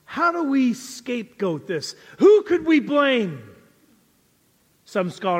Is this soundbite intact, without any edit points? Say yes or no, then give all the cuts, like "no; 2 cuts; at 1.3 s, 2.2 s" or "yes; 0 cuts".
yes; 0 cuts